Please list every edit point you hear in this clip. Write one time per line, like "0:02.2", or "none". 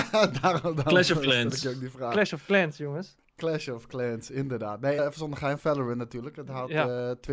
0:05.0